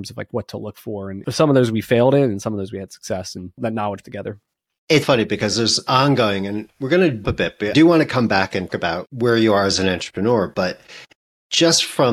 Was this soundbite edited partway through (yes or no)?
yes